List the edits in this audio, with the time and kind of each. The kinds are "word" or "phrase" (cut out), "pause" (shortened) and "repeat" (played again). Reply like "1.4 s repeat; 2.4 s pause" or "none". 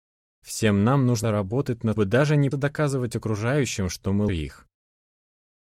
1.2 s word; 2.0 s phrase; 2.5 s word; 4.3 s word